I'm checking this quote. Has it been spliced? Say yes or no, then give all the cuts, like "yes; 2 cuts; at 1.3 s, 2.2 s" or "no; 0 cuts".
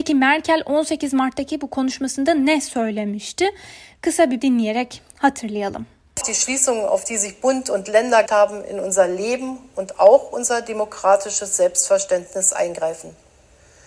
yes; 3 cuts; at 4.4 s, 6.2 s, 8.3 s